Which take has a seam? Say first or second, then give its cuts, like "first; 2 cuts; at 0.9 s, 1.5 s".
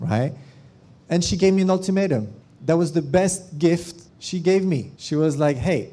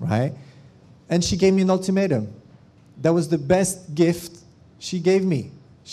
first; 3 cuts; at 2.4 s, 4.1 s, 4.9 s